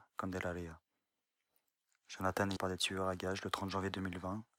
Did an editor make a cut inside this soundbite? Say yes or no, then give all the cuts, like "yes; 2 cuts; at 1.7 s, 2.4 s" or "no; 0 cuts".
yes; 1 cut; at 2.6 s